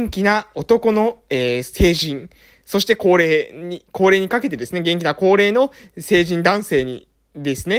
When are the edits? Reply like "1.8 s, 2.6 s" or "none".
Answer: none